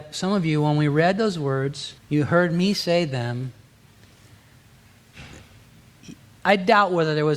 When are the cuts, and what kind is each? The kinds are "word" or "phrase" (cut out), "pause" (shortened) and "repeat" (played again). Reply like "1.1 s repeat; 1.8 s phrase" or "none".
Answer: 2.0 s pause

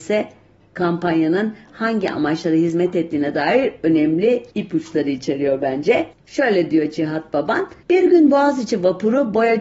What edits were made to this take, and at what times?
4.5 s pause; 6.1 s pause; 7.8 s pause

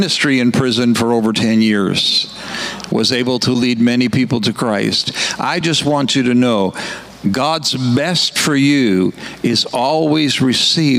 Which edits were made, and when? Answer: none

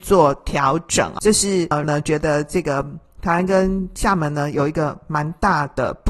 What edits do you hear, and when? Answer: 1.2 s word; 1.8 s word

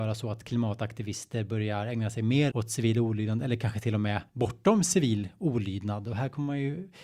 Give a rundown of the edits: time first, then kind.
2.5 s word; 4.3 s pause

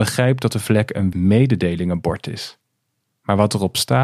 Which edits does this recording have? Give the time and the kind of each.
1.1 s word

